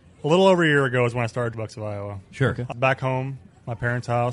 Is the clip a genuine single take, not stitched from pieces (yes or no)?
no